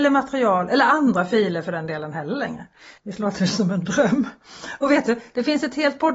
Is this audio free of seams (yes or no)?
no